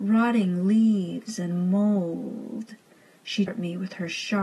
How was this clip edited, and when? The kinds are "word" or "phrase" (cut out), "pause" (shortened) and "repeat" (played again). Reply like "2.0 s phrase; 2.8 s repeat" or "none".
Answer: 3.5 s word